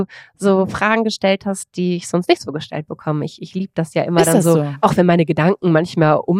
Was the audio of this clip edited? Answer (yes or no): no